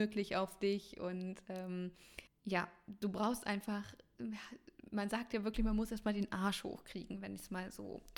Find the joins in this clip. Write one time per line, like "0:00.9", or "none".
0:02.3